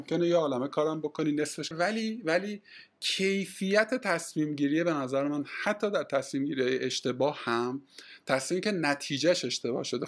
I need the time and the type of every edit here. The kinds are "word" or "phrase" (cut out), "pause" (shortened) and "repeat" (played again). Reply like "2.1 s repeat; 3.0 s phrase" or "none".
1.7 s phrase